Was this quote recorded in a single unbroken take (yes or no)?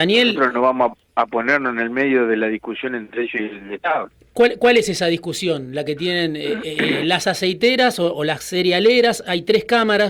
yes